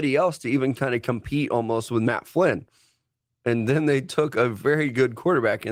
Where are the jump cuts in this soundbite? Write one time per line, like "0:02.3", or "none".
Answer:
none